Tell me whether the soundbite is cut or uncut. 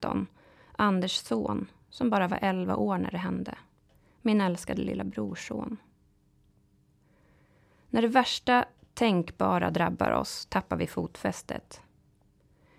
uncut